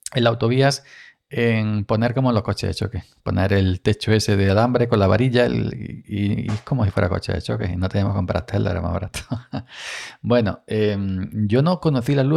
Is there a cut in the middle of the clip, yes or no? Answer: no